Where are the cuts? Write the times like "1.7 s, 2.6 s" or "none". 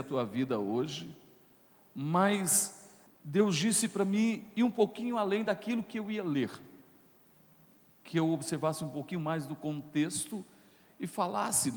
3.1 s